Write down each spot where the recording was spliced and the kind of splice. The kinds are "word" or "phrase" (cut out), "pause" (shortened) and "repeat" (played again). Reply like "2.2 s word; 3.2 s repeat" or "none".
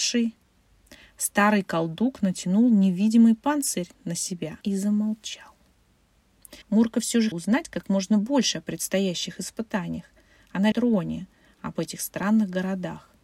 4.6 s pause; 6.6 s pause; 7.3 s word; 10.7 s phrase